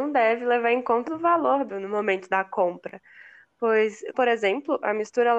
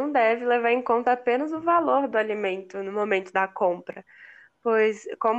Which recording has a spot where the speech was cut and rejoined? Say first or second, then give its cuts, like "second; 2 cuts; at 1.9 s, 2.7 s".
first; 3 cuts; at 1.1 s, 1.7 s, 4.1 s